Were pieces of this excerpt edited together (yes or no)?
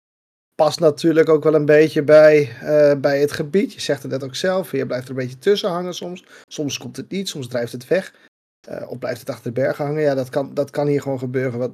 no